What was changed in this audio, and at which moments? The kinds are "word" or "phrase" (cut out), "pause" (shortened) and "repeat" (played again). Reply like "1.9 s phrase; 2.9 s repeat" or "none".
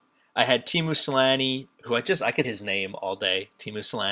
1.7 s pause; 2.4 s word